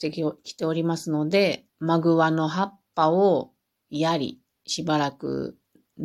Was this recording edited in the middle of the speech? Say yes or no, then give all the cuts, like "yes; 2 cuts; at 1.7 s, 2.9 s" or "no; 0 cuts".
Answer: yes; 1 cut; at 1.7 s